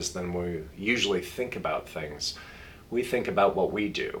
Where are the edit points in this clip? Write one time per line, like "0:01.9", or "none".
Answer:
none